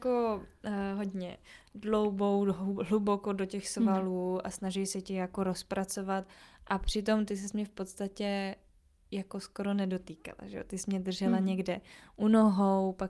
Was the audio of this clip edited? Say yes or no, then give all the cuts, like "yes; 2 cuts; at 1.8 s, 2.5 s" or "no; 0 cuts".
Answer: no; 0 cuts